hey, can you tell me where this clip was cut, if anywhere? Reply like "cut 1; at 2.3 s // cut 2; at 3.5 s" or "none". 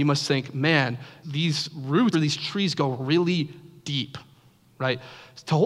cut 1; at 1.2 s // cut 2; at 2.1 s

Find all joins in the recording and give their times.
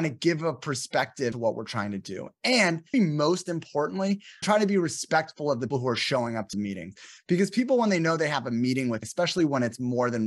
cut 1; at 1.3 s // cut 2; at 2.9 s // cut 3; at 4.4 s // cut 4; at 5.7 s // cut 5; at 6.5 s // cut 6; at 9.0 s

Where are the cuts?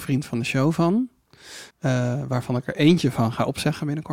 cut 1; at 1.7 s

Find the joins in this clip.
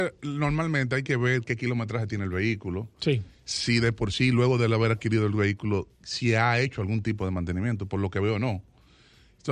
cut 1; at 5.9 s

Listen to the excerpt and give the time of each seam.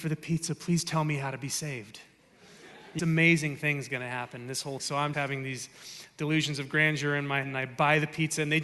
cut 1; at 3.0 s // cut 2; at 4.8 s // cut 3; at 5.1 s // cut 4; at 7.4 s

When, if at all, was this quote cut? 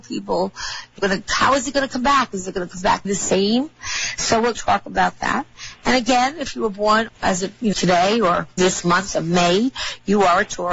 cut 1; at 1.0 s // cut 2; at 3.0 s // cut 3; at 4.5 s // cut 4; at 7.1 s // cut 5; at 7.7 s // cut 6; at 8.6 s

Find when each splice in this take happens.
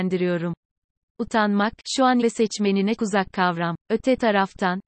cut 1; at 2.2 s // cut 2; at 3.0 s // cut 3; at 3.3 s // cut 4; at 3.8 s

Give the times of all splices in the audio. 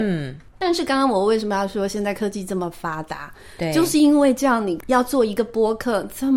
none

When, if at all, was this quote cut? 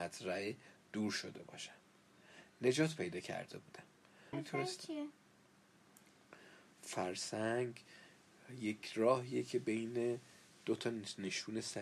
cut 1; at 4.3 s

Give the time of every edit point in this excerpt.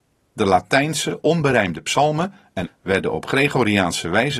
cut 1; at 2.7 s

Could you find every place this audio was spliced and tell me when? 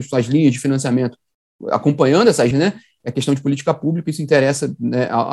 cut 1; at 2.5 s

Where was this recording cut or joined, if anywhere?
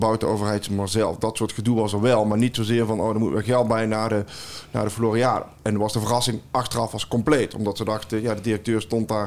none

